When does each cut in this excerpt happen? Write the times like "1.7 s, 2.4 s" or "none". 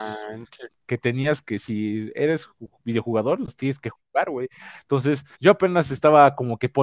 5.3 s